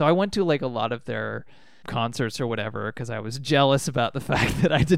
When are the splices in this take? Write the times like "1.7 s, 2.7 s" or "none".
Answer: none